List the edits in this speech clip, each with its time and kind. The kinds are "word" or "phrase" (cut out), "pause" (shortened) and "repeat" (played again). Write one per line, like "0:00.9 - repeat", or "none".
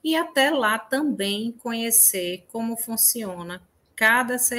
none